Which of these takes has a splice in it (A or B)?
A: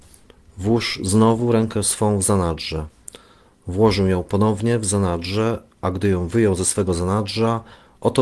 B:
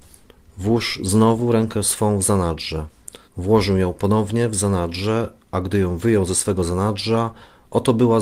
B